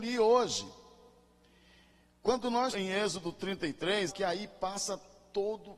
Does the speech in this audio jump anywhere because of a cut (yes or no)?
yes